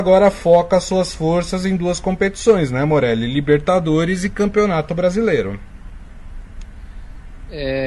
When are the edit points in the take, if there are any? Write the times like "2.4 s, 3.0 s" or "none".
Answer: none